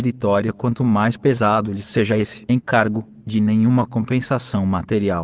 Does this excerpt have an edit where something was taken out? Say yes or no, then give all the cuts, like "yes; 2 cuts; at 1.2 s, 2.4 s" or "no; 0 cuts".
no; 0 cuts